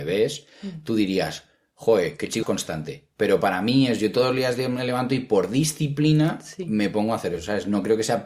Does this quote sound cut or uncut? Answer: cut